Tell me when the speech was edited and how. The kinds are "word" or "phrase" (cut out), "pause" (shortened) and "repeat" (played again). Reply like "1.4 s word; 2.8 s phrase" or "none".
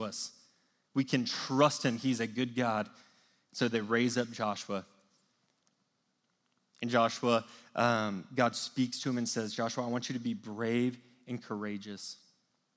none